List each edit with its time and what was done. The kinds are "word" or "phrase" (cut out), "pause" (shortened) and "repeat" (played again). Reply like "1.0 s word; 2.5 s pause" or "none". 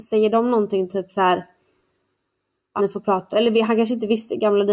2.8 s word; 3.3 s word